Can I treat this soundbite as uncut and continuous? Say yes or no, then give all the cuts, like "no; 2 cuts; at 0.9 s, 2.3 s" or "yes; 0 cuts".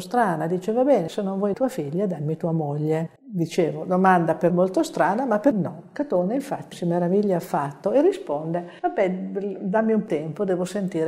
no; 8 cuts; at 1.1 s, 1.5 s, 3.2 s, 4.5 s, 5.5 s, 6.7 s, 8.8 s, 10.1 s